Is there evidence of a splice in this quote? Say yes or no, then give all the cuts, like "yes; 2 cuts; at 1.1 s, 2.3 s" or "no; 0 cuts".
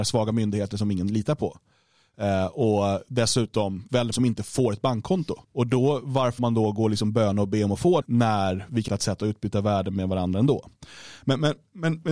yes; 5 cuts; at 4.1 s, 5.4 s, 6.4 s, 8.0 s, 8.9 s